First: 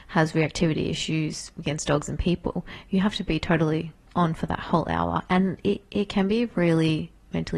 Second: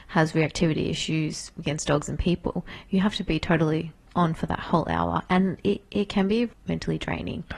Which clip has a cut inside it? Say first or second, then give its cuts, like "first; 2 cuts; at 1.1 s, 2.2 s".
second; 1 cut; at 6.5 s